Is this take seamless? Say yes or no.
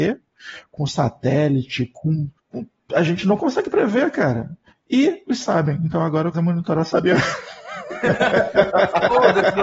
no